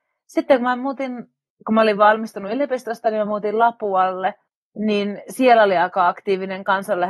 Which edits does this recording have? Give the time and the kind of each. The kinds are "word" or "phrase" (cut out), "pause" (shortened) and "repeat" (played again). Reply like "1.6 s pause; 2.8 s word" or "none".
none